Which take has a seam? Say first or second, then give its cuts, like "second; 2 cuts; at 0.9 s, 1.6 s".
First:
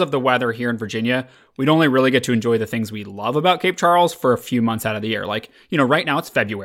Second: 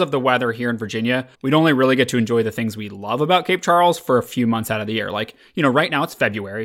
second; 1 cut; at 1.3 s